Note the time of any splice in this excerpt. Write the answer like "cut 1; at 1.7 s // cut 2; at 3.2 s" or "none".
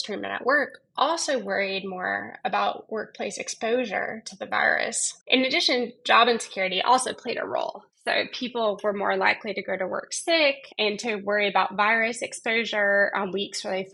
cut 1; at 5.2 s // cut 2; at 10.7 s